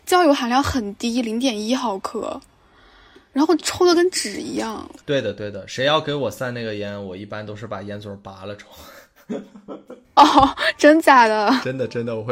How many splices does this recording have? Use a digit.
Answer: 2